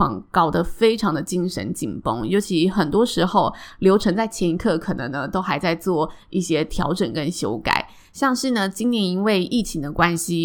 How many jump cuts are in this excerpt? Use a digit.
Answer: 0